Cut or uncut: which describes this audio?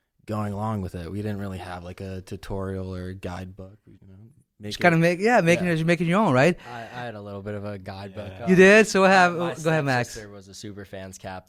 cut